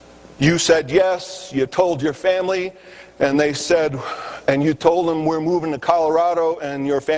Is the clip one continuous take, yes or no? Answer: yes